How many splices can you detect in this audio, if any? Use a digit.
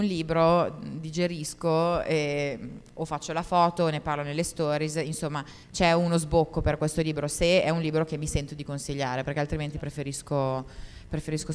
1